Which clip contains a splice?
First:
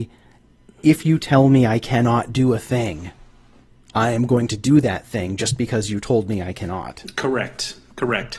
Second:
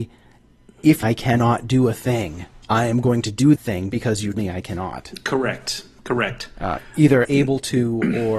second; 6 cuts; at 1.0 s, 2.6 s, 3.6 s, 3.9 s, 4.3 s, 7.2 s

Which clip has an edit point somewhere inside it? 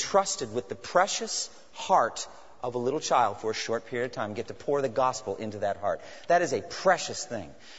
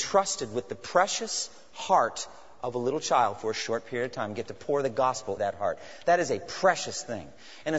second; 1 cut; at 5.4 s

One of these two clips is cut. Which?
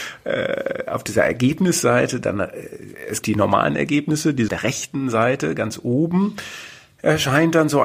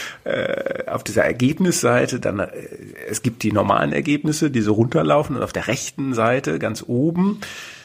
first; 2 cuts; at 3.2 s, 4.5 s

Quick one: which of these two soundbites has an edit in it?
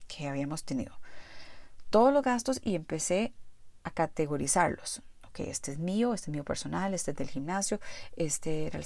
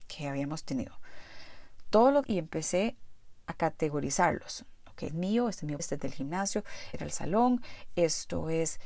second; 4 cuts; at 2.2 s, 5.1 s, 5.8 s, 6.9 s

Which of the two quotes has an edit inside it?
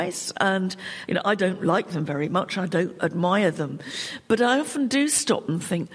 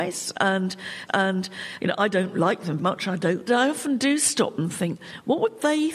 second; 3 cuts; at 1.1 s, 2.8 s, 3.5 s

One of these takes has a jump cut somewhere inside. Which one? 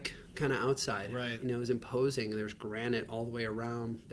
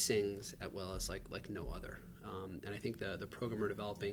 first; 1 cut; at 1.4 s

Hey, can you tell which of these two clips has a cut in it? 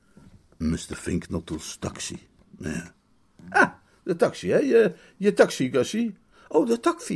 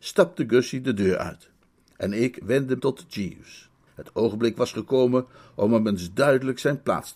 second; 2 cuts; at 2.8 s, 3.9 s

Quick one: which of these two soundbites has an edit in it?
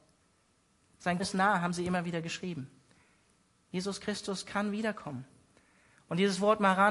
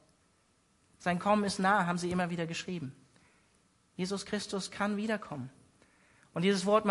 first; 1 cut; at 1.2 s

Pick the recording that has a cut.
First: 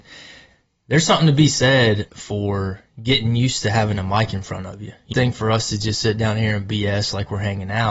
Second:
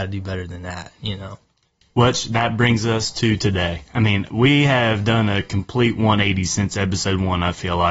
first; 1 cut; at 5.1 s

